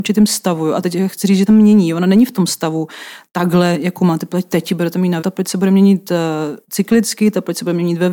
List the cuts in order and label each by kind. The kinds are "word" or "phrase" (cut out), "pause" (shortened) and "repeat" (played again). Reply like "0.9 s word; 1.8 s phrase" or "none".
1.5 s phrase; 5.2 s phrase